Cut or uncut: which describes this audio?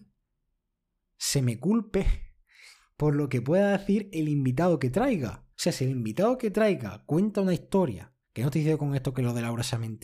cut